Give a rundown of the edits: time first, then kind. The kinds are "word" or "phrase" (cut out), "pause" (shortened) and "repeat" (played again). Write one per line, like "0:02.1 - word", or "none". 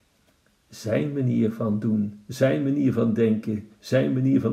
none